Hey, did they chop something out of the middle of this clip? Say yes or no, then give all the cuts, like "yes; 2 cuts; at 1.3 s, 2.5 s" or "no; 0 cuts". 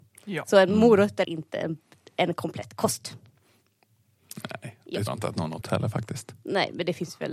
yes; 3 cuts; at 1.2 s, 5.1 s, 5.6 s